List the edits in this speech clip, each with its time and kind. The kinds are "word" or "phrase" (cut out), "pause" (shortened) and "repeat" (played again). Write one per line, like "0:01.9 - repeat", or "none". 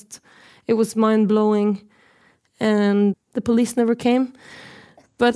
0:03.1 - phrase